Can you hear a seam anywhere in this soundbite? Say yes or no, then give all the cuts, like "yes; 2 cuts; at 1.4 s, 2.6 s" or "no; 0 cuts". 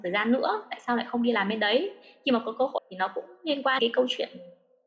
yes; 2 cuts; at 2.8 s, 3.8 s